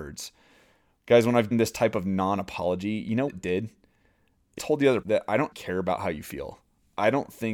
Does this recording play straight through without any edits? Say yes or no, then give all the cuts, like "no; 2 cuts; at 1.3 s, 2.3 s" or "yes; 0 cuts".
no; 5 cuts; at 1.5 s, 3.3 s, 4.6 s, 5.0 s, 5.5 s